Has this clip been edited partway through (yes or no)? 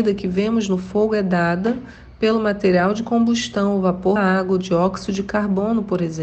yes